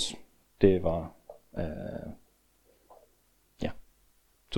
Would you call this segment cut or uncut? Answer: uncut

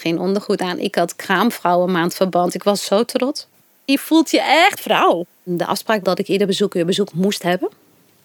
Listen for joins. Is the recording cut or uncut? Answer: cut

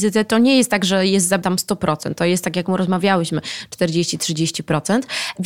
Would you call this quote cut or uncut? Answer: cut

